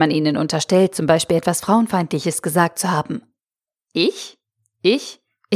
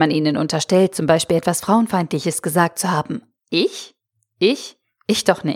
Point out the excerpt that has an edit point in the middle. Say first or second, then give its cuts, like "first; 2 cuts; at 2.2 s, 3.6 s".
second; 1 cut; at 3.4 s